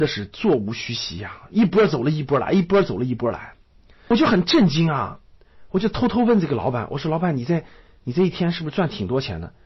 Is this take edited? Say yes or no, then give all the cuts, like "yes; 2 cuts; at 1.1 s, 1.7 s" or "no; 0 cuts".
no; 0 cuts